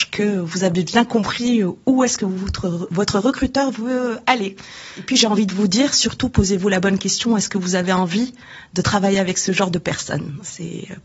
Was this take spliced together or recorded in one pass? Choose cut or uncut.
uncut